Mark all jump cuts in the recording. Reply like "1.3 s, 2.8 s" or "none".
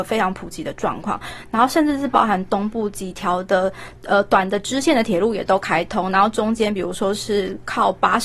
4.0 s